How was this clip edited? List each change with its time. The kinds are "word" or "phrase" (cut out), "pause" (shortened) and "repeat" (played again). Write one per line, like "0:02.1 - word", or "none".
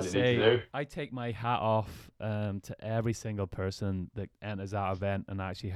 0:04.3 - pause